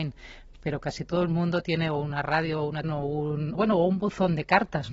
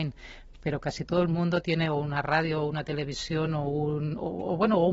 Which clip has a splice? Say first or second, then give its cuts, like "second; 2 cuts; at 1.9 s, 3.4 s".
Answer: first; 2 cuts; at 2.8 s, 3.5 s